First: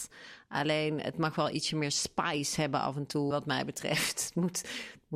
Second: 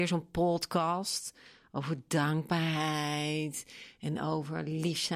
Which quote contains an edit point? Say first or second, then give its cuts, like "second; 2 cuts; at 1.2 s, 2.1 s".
first; 1 cut; at 3.3 s